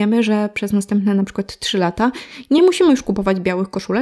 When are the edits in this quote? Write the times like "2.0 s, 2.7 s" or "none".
none

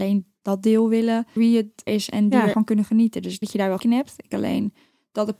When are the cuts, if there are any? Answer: 1.4 s, 1.9 s, 2.5 s, 3.4 s, 3.8 s, 4.3 s

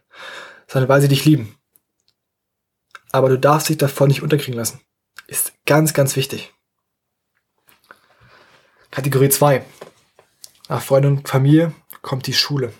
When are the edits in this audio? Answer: none

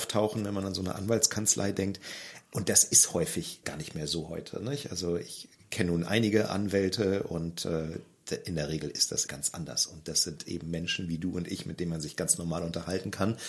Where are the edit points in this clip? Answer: 3.6 s, 9.3 s

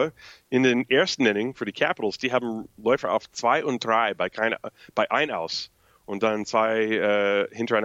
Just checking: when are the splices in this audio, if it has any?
none

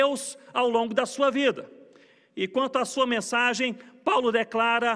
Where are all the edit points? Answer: none

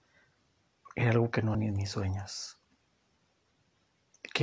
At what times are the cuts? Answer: 1.5 s

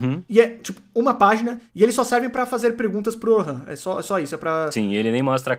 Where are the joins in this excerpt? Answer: none

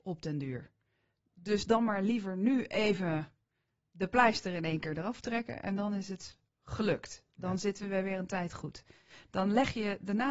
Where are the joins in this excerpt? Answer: none

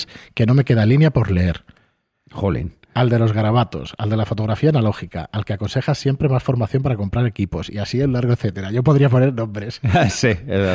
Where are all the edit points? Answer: none

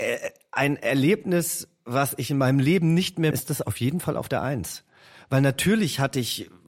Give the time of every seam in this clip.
3.3 s

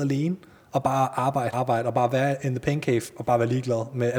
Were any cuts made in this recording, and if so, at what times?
1.5 s

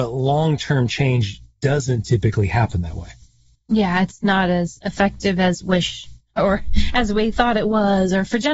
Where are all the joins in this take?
5.6 s, 7.3 s

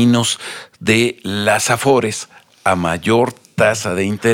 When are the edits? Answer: none

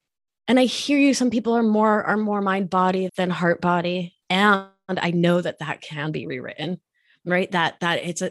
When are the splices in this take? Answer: 3.1 s, 4.2 s

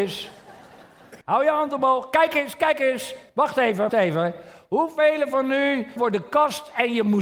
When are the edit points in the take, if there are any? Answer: 1.2 s, 3.3 s, 3.9 s, 6.0 s

